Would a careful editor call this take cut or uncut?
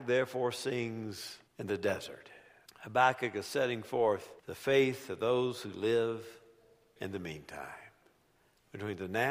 cut